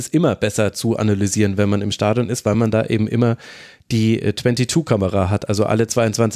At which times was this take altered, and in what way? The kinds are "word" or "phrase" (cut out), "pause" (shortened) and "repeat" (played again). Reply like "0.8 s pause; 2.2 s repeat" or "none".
none